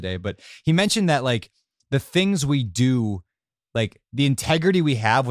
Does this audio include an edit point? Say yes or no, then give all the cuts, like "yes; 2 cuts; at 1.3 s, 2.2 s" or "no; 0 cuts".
no; 0 cuts